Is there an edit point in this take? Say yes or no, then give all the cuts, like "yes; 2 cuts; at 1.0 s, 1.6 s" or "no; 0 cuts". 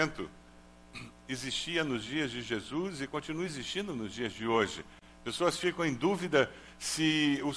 no; 0 cuts